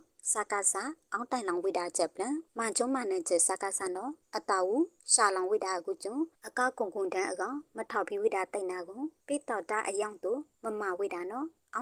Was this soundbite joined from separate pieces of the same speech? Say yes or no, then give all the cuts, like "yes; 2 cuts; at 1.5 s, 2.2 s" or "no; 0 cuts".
yes; 1 cut; at 2.5 s